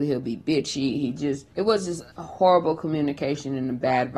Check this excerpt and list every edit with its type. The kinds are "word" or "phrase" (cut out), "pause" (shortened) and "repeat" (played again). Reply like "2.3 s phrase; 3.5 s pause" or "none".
1.5 s pause; 2.1 s pause